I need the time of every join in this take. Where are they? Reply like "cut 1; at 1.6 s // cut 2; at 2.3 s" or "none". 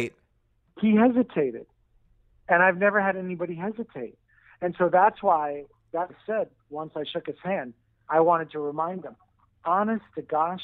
cut 1; at 6.1 s